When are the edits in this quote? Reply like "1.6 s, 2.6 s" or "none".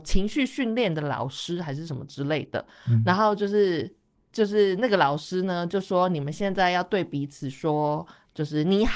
none

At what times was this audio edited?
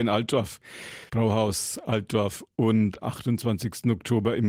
1.1 s, 3.0 s

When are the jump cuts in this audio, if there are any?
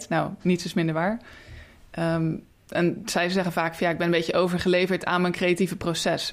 none

